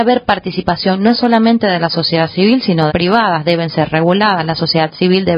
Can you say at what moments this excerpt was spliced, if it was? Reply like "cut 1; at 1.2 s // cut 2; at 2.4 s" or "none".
cut 1; at 2.9 s